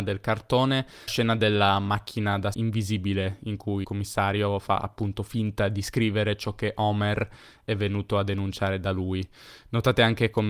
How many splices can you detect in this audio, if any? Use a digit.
3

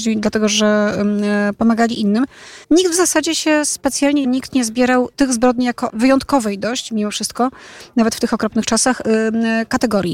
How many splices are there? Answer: 4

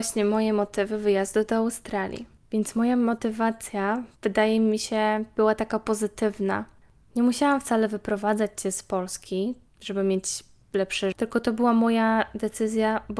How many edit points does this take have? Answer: 1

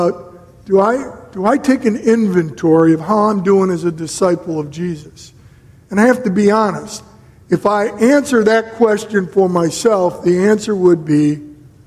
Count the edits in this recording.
0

